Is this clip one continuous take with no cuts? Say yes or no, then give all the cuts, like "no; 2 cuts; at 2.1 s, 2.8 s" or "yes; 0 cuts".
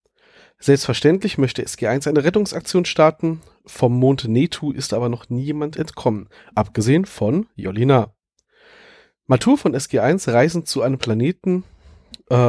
yes; 0 cuts